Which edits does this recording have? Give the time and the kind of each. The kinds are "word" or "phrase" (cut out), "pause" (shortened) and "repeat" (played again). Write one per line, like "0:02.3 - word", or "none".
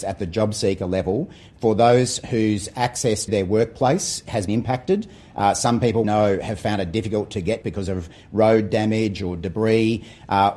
0:03.3 - word
0:04.5 - word
0:06.0 - word
0:07.6 - phrase